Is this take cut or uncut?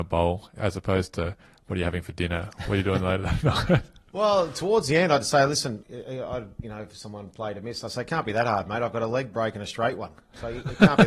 cut